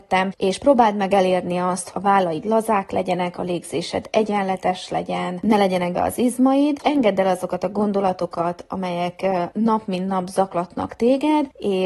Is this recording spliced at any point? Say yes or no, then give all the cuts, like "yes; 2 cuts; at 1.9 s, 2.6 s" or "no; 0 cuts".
yes; 2 cuts; at 1.9 s, 5.9 s